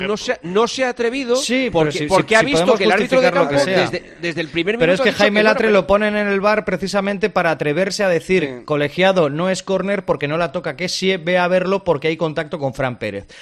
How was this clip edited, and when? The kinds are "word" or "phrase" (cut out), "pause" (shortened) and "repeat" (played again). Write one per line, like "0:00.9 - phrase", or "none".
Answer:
none